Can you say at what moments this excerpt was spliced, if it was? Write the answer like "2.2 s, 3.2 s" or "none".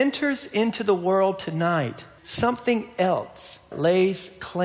2.2 s, 3.7 s